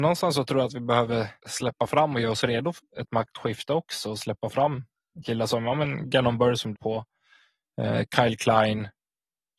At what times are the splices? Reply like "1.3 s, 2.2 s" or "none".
1.4 s, 2.8 s, 6.7 s